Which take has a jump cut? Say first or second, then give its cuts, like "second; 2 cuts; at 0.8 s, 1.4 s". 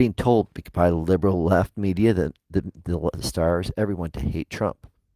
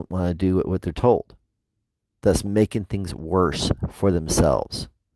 first; 1 cut; at 3.1 s